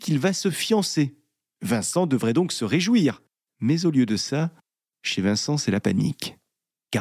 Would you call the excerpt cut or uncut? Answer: uncut